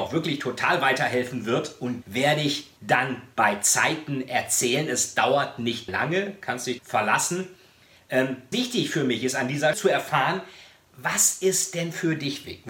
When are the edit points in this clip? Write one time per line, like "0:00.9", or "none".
0:02.0
0:02.8
0:05.9
0:06.8
0:08.5
0:09.7